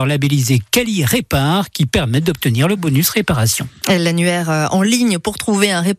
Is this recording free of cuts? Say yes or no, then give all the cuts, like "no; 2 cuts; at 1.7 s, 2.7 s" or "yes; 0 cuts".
yes; 0 cuts